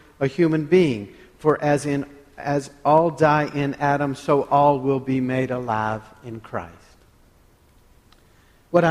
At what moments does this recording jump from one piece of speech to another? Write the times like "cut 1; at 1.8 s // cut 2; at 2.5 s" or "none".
none